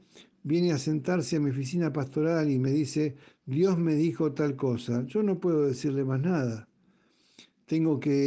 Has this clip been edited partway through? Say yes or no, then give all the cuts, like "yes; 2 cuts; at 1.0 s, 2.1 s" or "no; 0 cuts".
no; 0 cuts